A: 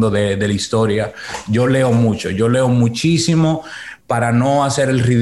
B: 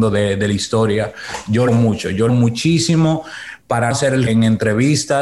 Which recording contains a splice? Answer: B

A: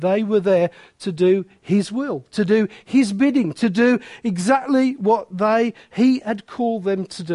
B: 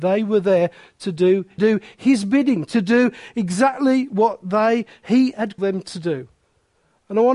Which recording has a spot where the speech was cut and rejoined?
B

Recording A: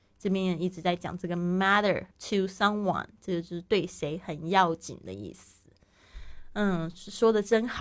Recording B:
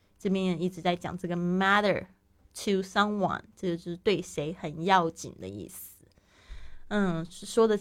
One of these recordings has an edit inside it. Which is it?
A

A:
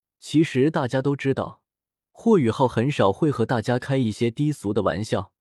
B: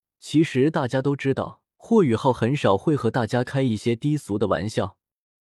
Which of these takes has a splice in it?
B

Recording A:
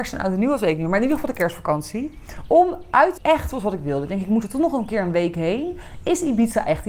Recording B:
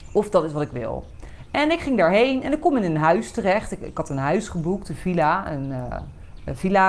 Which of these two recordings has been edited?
A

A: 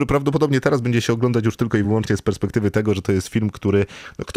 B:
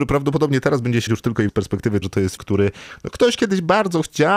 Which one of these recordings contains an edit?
B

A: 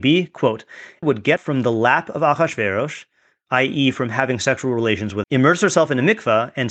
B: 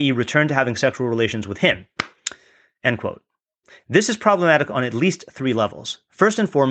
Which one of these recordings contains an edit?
A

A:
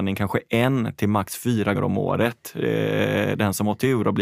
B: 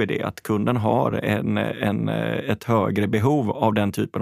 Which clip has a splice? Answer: A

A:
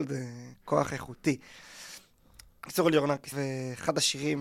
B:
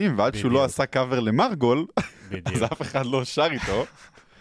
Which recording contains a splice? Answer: A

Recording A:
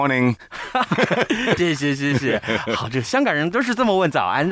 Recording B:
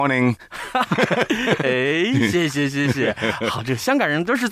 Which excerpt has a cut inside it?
A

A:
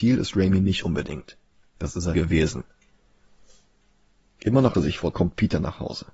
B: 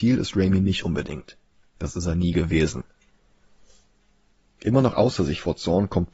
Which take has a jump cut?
A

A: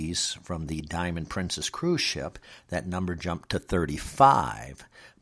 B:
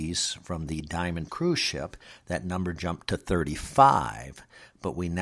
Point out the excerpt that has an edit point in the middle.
B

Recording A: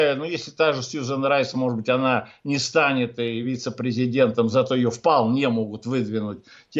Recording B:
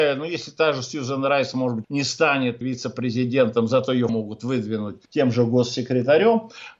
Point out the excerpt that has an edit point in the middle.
B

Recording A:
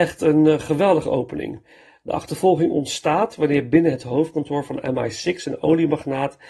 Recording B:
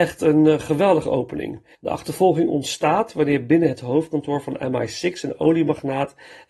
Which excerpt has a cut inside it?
B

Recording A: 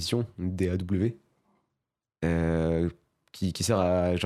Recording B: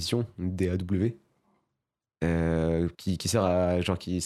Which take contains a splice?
B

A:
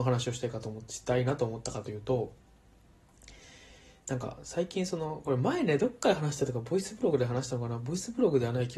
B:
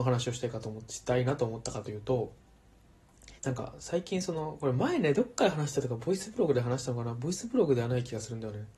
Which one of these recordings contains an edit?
B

